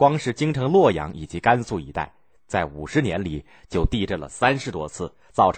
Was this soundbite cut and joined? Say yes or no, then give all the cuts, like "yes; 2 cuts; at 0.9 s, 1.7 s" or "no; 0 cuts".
no; 0 cuts